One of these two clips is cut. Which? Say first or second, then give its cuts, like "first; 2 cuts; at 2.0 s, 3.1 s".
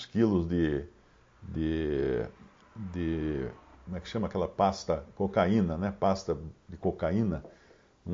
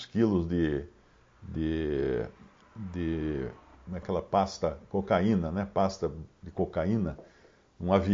second; 1 cut; at 4.0 s